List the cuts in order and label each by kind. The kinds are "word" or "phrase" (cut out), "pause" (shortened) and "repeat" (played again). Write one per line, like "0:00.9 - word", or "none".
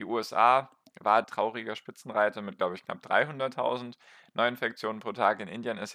0:01.2 - word